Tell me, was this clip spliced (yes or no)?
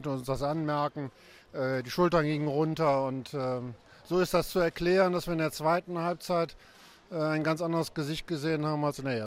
no